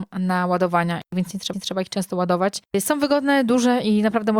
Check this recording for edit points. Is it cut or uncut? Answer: cut